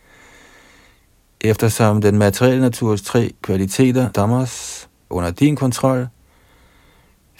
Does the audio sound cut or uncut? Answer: cut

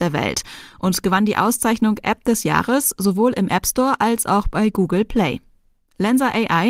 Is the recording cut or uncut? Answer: uncut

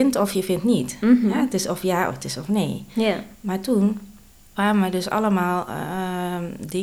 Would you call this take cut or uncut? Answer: uncut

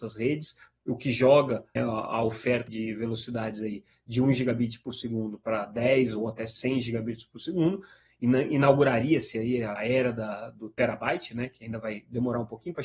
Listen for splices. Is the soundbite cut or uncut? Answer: cut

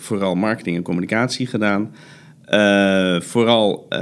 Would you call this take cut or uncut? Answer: uncut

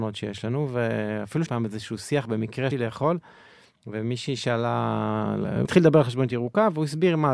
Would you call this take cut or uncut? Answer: cut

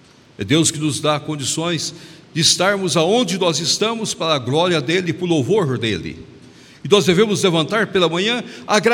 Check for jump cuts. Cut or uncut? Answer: uncut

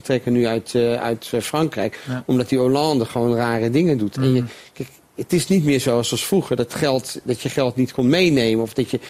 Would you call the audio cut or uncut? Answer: uncut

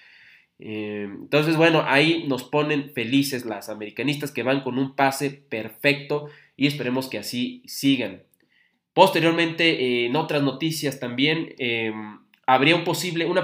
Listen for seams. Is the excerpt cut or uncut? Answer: uncut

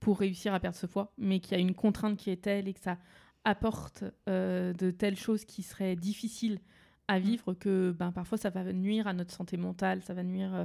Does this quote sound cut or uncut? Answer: uncut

